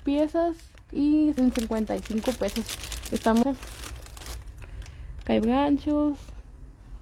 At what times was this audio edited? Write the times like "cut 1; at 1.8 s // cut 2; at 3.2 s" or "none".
cut 1; at 1.4 s // cut 2; at 3.4 s // cut 3; at 5.4 s